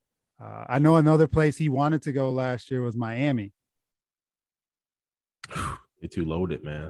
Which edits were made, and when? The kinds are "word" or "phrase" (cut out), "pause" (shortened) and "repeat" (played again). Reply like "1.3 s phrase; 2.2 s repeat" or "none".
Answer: none

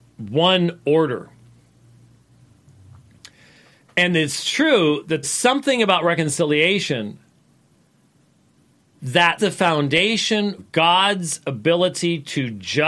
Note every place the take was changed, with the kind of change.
5.2 s word; 9.4 s word; 10.6 s word

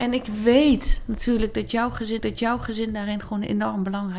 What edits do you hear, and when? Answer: 2.2 s repeat

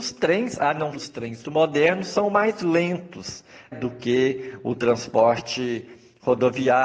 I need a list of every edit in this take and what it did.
0.9 s word; 1.4 s word; 3.7 s word

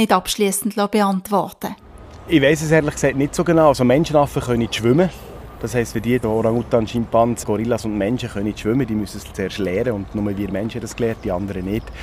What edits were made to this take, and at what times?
6.2 s word; 7.4 s word

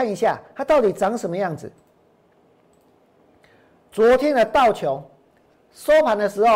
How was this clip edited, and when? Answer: none

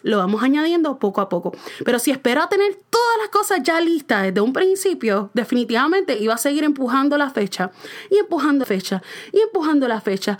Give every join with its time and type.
2.8 s pause; 8.6 s word

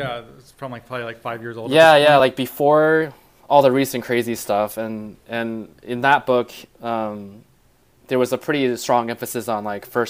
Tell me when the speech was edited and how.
none

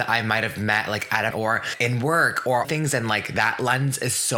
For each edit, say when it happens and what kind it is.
1.3 s word; 2.6 s phrase

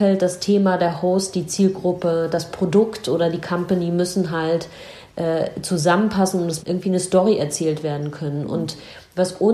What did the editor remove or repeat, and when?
6.6 s word

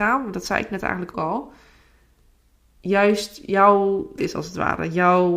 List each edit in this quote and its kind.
1.1 s word; 4.2 s word

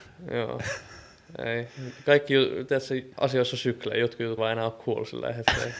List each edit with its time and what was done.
3.1 s pause; 4.4 s word

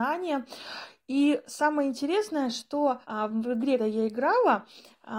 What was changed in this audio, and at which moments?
3.0 s pause; 3.8 s word

